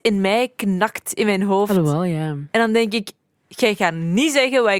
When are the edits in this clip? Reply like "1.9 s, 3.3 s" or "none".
none